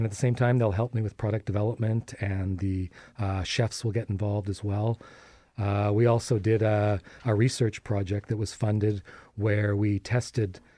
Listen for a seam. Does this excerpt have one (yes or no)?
no